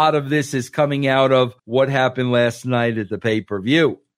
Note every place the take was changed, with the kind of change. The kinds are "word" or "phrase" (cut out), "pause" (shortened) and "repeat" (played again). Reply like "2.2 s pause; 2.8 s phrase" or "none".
1.6 s pause